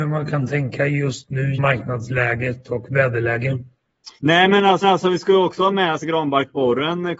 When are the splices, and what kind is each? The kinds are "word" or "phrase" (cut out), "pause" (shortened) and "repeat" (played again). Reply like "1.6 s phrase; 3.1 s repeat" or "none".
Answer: 1.5 s word; 4.2 s pause; 4.8 s repeat; 6.0 s phrase

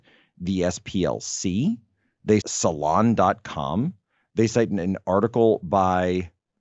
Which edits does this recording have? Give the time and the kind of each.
2.4 s word

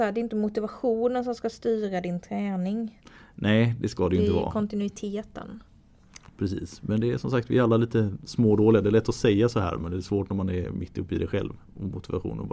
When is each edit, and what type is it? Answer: none

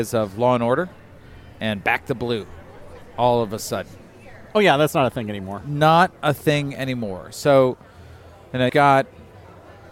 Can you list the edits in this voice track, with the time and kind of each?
8.7 s word

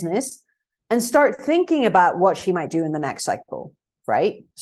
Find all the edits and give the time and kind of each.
none

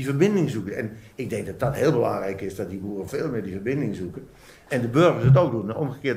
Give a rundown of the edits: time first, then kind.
3.1 s word

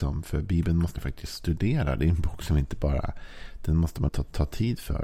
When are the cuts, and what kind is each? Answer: 1.0 s word; 4.1 s word

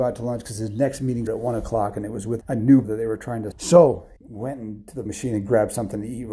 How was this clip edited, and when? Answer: 1.3 s word; 2.4 s word; 2.8 s word; 3.5 s word; 4.2 s word; 5.1 s word

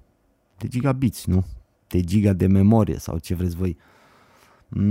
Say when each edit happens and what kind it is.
none

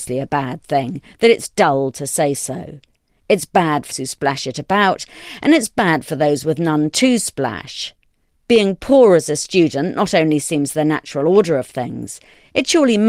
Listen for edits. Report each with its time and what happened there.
3.9 s word

